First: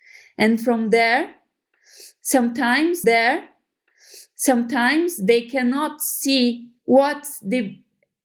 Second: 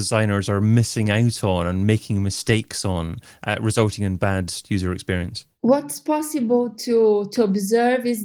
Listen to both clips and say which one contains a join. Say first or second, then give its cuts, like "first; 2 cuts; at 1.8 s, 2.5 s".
first; 2 cuts; at 3.0 s, 6.8 s